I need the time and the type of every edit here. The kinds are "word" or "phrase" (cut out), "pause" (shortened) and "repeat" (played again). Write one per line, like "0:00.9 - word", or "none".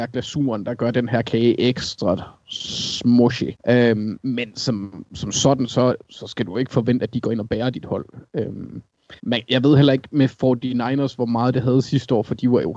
0:03.6 - pause
0:09.2 - pause